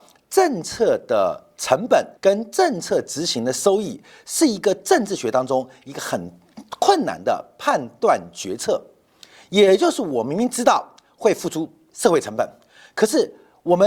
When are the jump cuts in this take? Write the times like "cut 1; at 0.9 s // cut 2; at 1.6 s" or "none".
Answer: cut 1; at 2.2 s